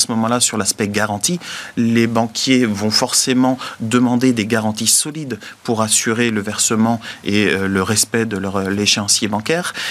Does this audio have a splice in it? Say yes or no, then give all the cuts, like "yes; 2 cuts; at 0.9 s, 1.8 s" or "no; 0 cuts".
no; 0 cuts